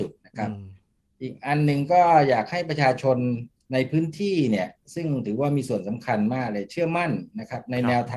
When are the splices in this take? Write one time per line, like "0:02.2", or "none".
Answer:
0:03.6